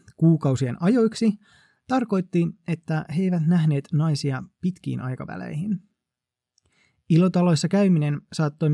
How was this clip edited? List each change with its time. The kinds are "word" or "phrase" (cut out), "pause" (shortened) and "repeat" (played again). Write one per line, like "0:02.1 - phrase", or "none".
none